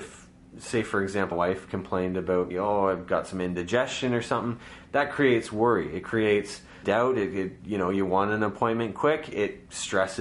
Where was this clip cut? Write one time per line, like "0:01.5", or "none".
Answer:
0:01.3
0:02.5
0:06.8